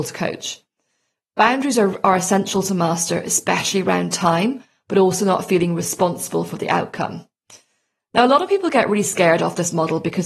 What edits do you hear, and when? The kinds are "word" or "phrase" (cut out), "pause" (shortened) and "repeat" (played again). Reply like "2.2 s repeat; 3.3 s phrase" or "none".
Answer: none

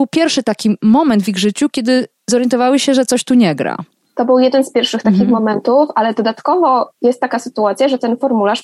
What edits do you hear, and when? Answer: none

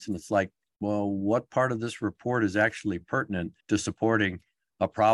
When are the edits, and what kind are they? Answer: 3.6 s pause

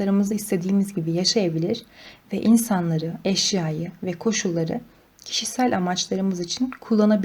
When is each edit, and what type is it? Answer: none

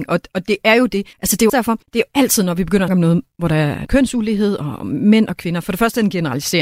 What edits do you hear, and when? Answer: 1.1 s pause; 1.5 s word; 1.8 s pause; 2.9 s word; 3.9 s word

